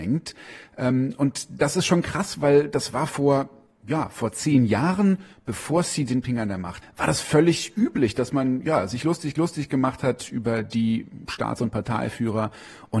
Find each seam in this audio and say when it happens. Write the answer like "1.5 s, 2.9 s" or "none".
6.8 s, 9.4 s